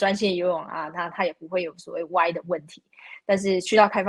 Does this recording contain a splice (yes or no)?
no